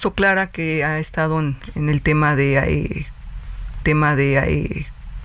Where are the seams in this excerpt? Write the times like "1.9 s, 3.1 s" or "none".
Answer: 3.8 s